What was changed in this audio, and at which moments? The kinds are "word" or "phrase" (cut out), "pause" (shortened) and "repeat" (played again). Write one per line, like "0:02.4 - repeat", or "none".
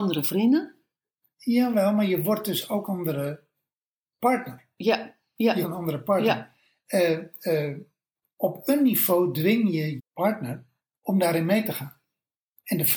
0:02.9 - word
0:05.6 - word
0:08.2 - word
0:10.0 - word